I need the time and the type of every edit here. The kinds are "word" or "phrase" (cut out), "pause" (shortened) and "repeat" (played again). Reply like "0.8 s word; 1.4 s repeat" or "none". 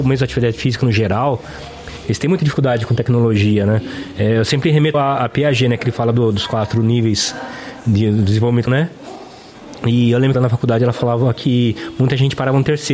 4.9 s word; 8.7 s word; 10.3 s phrase

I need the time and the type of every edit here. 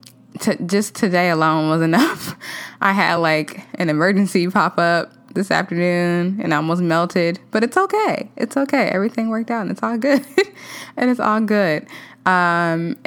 none

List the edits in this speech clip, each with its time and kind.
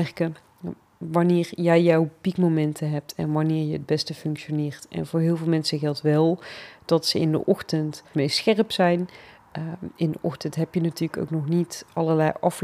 8.1 s word

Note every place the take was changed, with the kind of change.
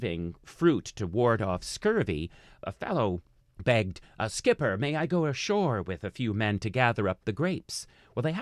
none

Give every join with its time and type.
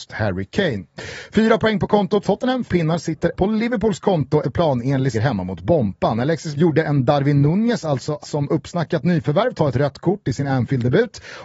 2.2 s word; 2.7 s word; 3.4 s word; 4.4 s word; 5.1 s word; 6.5 s word; 8.2 s word

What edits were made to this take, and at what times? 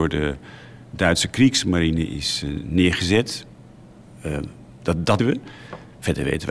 5.2 s word

